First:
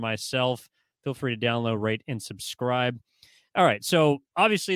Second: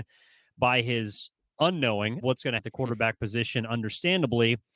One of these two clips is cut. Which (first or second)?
second